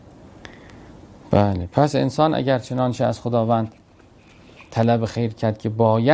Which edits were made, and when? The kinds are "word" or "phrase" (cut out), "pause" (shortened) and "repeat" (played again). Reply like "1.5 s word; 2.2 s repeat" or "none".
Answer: none